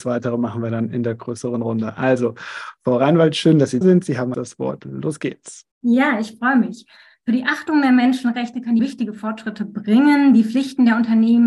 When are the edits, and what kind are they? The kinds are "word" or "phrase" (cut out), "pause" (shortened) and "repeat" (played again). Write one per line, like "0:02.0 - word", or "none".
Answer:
0:03.8 - word
0:04.3 - phrase
0:05.7 - pause
0:08.8 - phrase